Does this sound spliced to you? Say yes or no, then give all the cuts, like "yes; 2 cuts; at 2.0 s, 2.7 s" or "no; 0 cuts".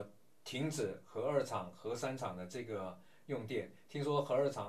no; 0 cuts